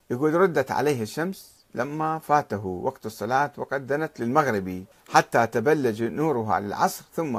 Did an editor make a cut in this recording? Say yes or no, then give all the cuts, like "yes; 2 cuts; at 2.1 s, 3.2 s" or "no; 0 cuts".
yes; 1 cut; at 4.9 s